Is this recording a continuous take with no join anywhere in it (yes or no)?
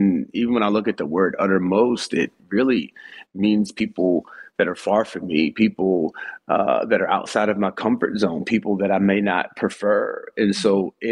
yes